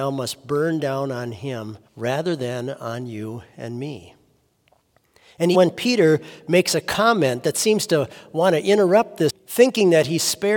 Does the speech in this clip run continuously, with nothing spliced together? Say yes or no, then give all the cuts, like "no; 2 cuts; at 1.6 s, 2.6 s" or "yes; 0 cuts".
no; 3 cuts; at 1.9 s, 5.5 s, 9.3 s